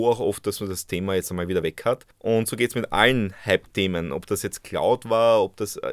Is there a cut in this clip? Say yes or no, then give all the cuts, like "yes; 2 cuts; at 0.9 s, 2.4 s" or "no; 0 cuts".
no; 0 cuts